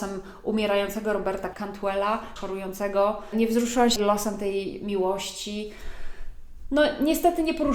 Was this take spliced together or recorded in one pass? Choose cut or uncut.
cut